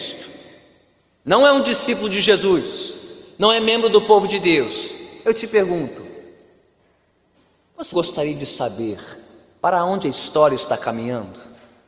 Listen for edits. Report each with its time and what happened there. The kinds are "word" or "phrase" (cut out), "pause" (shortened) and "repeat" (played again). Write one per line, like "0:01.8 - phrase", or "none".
0:07.9 - word